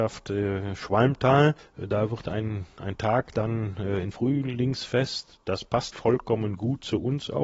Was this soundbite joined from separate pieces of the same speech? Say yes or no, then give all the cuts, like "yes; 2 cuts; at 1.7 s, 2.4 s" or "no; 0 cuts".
yes; 3 cuts; at 1.6 s, 4.1 s, 5.9 s